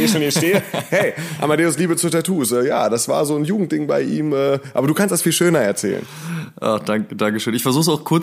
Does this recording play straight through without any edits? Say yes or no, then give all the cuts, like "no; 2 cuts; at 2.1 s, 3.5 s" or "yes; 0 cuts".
yes; 0 cuts